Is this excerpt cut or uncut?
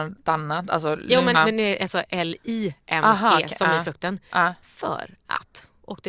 cut